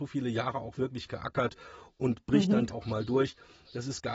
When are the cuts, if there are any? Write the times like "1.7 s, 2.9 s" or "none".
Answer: 2.7 s